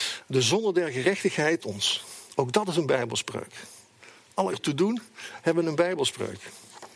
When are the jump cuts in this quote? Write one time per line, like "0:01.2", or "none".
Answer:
0:01.6
0:04.5